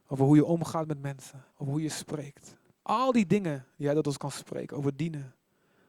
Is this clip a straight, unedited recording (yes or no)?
no